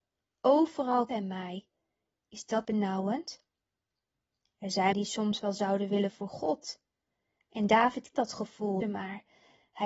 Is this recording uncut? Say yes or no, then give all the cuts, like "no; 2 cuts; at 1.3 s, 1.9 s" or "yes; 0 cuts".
no; 6 cuts; at 1.1 s, 2.6 s, 4.9 s, 6.1 s, 8.1 s, 8.8 s